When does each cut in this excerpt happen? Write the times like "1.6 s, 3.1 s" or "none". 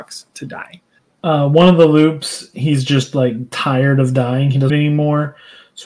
4.7 s